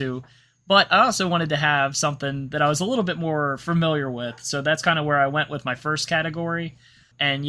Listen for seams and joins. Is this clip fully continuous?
yes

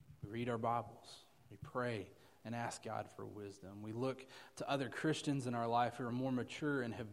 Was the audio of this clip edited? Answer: no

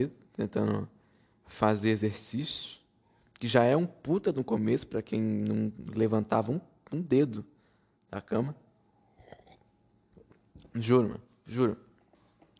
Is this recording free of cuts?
yes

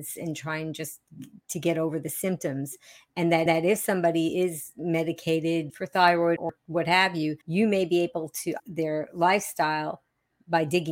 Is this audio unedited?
no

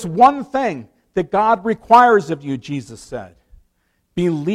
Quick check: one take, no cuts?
yes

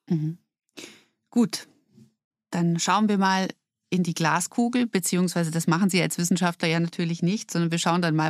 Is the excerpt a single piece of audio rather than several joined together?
yes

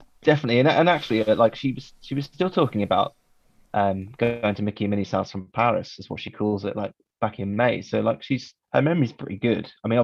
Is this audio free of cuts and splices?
yes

